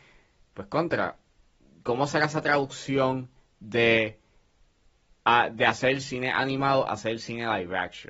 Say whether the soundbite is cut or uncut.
uncut